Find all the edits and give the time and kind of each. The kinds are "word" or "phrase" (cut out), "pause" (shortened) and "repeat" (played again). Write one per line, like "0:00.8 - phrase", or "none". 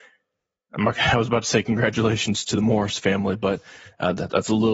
none